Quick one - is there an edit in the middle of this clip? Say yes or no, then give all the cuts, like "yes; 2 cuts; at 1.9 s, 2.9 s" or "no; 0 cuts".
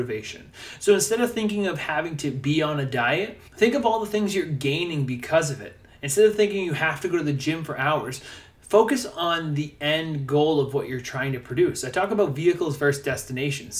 yes; 1 cut; at 3.5 s